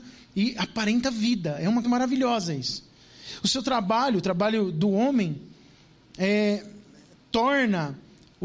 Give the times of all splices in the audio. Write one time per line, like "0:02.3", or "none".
0:01.8